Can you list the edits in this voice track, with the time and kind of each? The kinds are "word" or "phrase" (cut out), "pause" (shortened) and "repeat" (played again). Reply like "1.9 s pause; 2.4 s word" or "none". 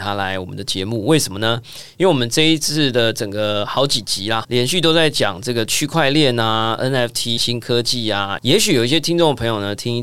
4.4 s word; 7.4 s word; 8.4 s phrase

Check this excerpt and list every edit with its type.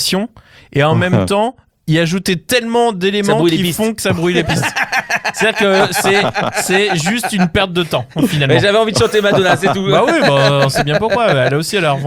none

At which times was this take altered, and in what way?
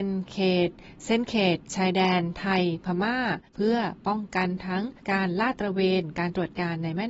3.5 s pause; 5.0 s pause

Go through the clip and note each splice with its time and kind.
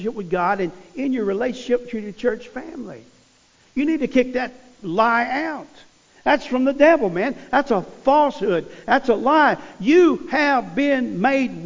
none

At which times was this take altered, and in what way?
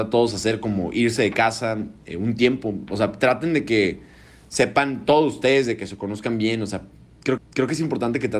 7.4 s repeat

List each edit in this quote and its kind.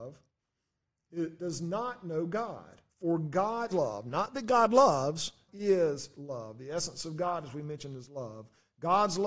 1.4 s word; 2.9 s pause; 3.7 s word; 5.5 s word

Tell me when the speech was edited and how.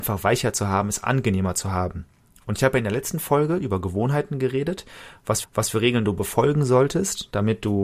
5.4 s repeat

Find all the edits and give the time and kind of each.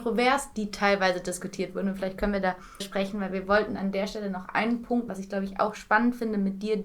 2.8 s phrase; 5.1 s word

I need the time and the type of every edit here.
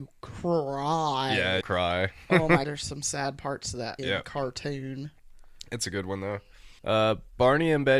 1.6 s word; 2.6 s word; 4.0 s word; 6.8 s pause

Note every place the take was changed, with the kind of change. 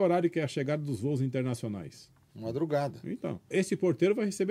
3.5 s word

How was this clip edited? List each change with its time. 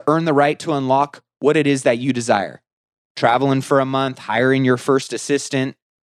none

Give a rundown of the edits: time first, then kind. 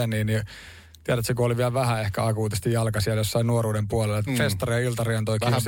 4.3 s word

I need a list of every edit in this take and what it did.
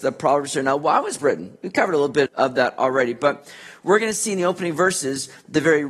1.2 s word; 2.3 s word

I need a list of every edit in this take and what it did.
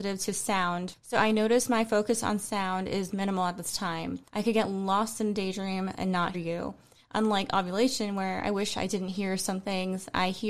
4.3 s pause; 6.3 s word

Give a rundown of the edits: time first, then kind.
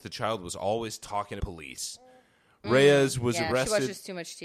1.4 s word

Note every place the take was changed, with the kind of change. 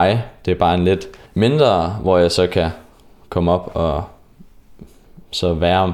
1.2 s pause

